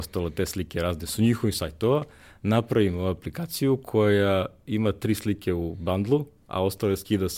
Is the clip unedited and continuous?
yes; 0 cuts

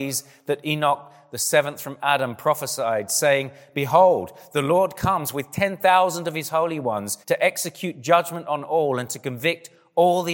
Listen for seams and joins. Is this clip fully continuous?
no; 1 cut; at 7.2 s

